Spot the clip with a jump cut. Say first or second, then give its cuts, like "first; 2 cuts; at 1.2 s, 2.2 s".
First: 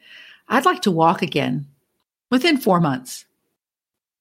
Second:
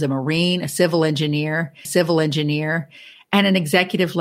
second; 1 cut; at 1.8 s